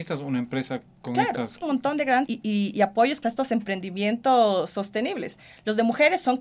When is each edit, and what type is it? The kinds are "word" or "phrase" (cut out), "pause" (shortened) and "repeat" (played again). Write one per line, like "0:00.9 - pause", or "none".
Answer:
0:01.6 - phrase
0:02.3 - word
0:03.2 - phrase